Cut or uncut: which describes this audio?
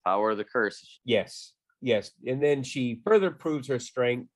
uncut